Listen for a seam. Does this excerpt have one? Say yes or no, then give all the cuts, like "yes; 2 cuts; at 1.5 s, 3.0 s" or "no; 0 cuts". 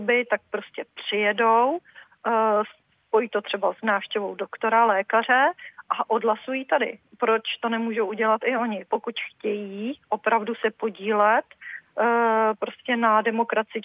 no; 0 cuts